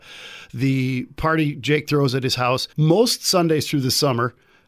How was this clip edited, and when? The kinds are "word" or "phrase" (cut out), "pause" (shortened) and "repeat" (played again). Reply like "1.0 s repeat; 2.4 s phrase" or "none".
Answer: 2.7 s pause